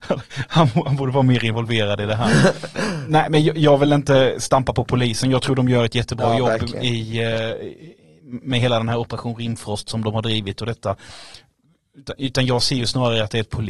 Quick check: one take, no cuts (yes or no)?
yes